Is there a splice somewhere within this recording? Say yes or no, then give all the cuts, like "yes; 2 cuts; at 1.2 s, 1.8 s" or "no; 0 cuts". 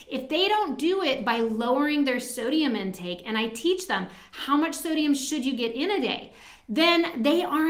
no; 0 cuts